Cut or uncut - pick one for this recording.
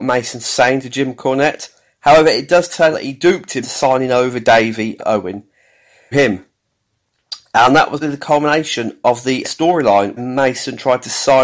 cut